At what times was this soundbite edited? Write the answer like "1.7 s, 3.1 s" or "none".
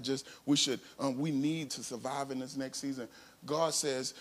1.7 s

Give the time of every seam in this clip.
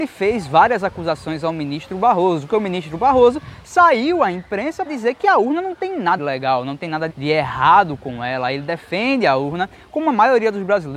2.5 s, 4.9 s, 6.2 s, 7.1 s

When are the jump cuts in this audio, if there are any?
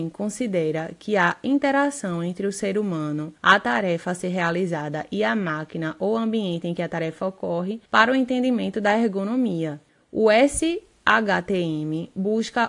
3.4 s, 7.9 s, 9.9 s

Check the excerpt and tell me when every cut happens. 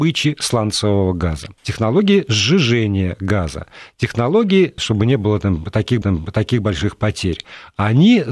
1.6 s, 4.8 s, 6.0 s

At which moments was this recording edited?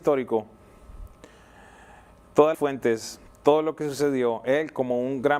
2.5 s

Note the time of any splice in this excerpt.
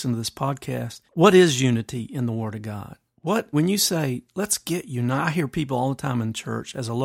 1.1 s, 3.5 s

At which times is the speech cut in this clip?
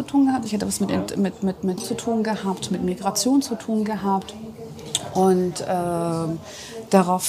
1.8 s

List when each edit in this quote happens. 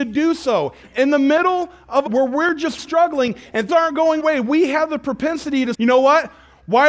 2.1 s, 2.8 s, 3.7 s, 4.2 s, 5.7 s

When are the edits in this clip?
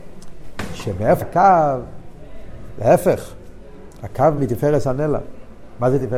1.2 s, 4.4 s

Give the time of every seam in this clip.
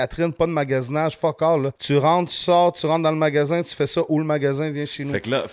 1.8 s

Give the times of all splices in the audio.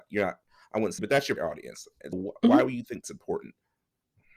1.0 s, 1.4 s, 2.1 s, 3.0 s

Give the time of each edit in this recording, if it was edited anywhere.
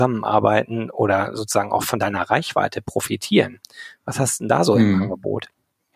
none

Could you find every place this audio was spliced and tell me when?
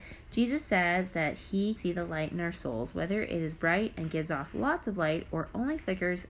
1.8 s

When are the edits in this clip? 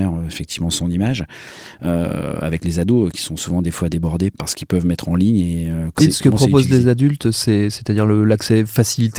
4.3 s, 6.0 s

